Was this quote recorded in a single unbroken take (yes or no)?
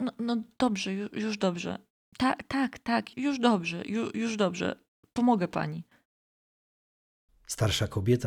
no